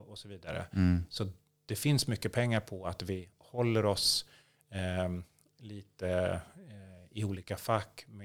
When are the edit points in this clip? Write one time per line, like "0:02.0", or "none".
none